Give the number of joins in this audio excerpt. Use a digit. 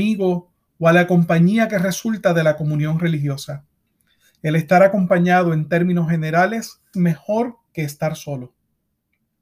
1